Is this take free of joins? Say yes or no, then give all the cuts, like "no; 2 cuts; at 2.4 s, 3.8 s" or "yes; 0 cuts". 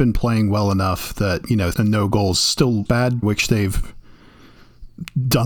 no; 3 cuts; at 1.7 s, 2.9 s, 3.2 s